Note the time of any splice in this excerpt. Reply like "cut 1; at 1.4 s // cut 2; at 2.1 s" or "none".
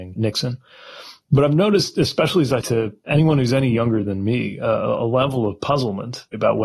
cut 1; at 2.6 s